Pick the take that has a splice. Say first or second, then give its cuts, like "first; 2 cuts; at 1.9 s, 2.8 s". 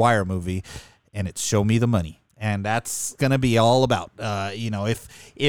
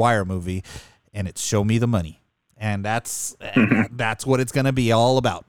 first; 2 cuts; at 2.3 s, 3.2 s